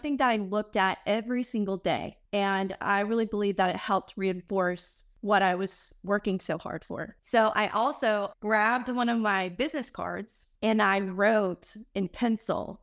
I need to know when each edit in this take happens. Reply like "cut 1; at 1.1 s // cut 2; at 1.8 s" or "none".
cut 1; at 2.3 s // cut 2; at 7.2 s // cut 3; at 10.6 s